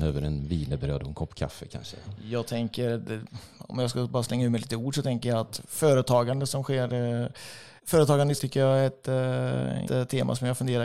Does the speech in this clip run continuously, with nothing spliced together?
no; 3 cuts; at 7.8 s, 8.4 s, 9.8 s

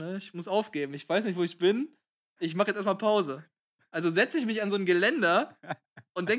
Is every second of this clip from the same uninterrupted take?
yes; 0 cuts

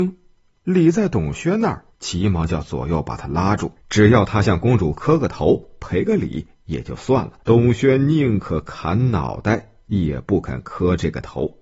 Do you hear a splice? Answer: yes; 3 cuts; at 1.9 s, 3.8 s, 7.4 s

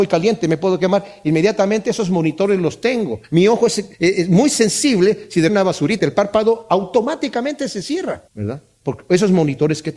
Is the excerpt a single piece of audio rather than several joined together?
no; 5 cuts; at 3.2 s, 3.9 s, 5.5 s, 6.0 s, 8.3 s

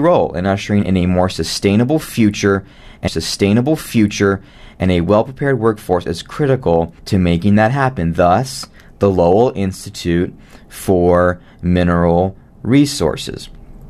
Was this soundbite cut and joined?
yes; 2 cuts; at 3.1 s, 7.0 s

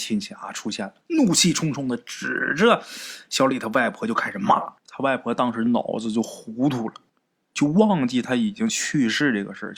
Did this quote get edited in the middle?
yes; 3 cuts; at 1.0 s, 4.8 s, 7.1 s

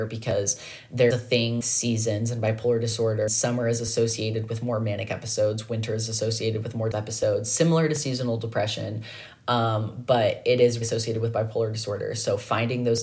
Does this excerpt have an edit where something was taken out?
yes; 5 cuts; at 1.1 s, 1.6 s, 3.3 s, 6.9 s, 10.8 s

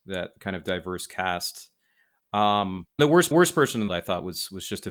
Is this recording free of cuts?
no; 3 cuts; at 3.0 s, 3.3 s, 3.9 s

